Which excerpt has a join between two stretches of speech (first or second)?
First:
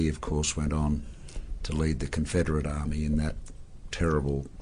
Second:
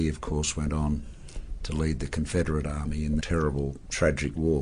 second